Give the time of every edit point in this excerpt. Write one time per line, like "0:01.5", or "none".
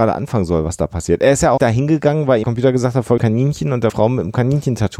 0:01.6
0:02.4
0:03.2
0:03.9